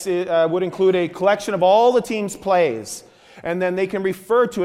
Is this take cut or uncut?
uncut